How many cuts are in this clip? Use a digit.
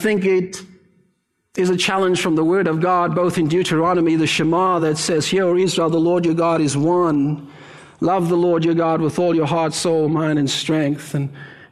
0